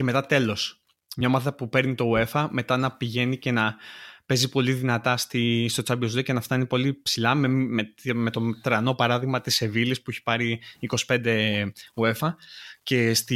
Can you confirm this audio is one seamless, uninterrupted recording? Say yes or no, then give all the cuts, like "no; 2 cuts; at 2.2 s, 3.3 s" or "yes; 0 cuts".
yes; 0 cuts